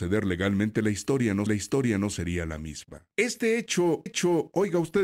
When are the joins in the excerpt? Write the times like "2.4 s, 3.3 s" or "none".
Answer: 1.5 s, 3.1 s, 4.1 s

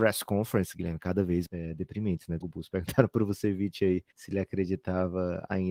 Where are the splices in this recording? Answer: 1.5 s, 2.4 s, 4.1 s

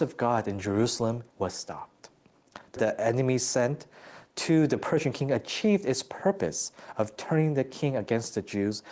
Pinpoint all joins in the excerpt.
1.3 s, 2.8 s

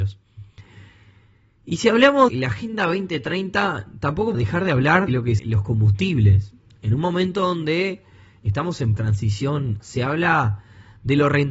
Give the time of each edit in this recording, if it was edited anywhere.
2.3 s, 4.3 s, 5.1 s, 5.4 s, 9.0 s, 9.8 s

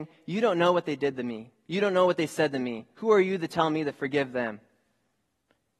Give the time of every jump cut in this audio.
none

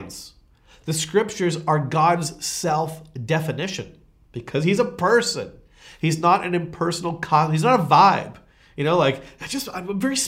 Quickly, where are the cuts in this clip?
none

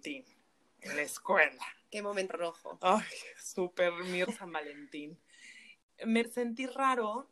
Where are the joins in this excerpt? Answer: 2.3 s, 4.2 s, 6.2 s

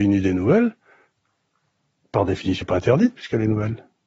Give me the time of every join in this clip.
2.6 s

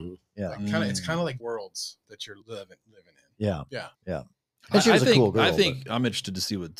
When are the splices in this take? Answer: 1.4 s, 2.4 s, 3.9 s

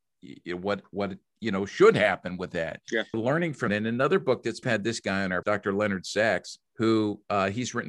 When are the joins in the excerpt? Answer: 3.1 s, 3.7 s, 4.6 s, 5.4 s, 6.7 s

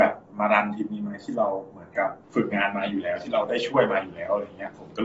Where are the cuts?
2.2 s

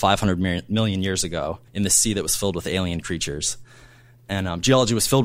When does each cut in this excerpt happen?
1.7 s

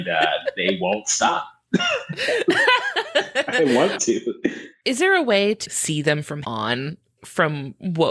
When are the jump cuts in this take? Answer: 4.0 s, 5.6 s, 6.4 s

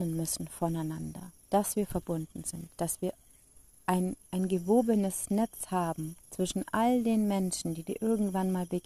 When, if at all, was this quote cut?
1.4 s, 4.2 s, 6.2 s

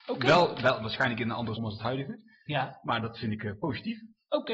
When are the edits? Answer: 1.6 s

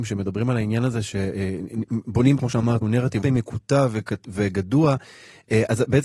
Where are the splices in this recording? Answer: 2.4 s, 2.8 s, 3.2 s

